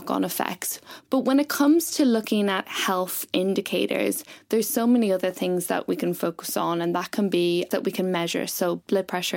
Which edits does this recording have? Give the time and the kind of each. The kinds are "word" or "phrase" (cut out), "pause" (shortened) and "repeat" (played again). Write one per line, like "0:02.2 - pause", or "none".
0:07.7 - word